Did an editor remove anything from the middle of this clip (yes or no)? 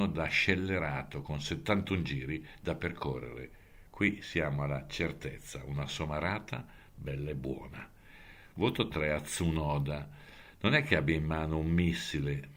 no